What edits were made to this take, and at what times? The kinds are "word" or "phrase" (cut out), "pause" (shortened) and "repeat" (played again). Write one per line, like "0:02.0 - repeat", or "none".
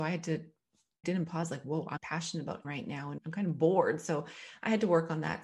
0:01.0 - word
0:02.0 - word
0:02.6 - word
0:03.2 - word